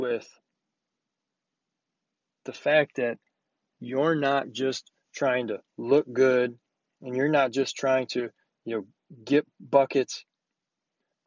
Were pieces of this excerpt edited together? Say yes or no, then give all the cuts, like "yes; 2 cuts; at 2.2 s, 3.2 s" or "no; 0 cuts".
yes; 1 cut; at 5.7 s